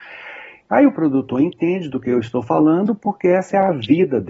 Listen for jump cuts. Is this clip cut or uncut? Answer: uncut